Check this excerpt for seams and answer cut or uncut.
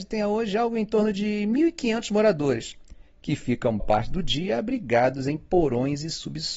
cut